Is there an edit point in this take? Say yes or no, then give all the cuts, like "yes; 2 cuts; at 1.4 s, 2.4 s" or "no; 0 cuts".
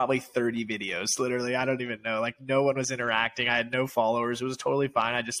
no; 0 cuts